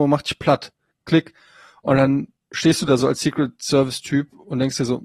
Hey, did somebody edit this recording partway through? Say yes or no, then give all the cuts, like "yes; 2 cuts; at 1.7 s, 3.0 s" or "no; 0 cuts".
no; 0 cuts